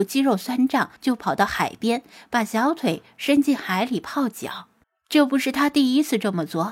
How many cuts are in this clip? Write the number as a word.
two